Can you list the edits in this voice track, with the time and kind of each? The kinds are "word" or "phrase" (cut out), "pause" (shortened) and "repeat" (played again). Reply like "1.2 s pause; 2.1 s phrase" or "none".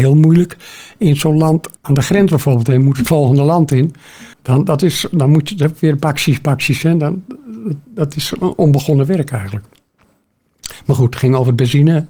1.8 s pause; 4.3 s pause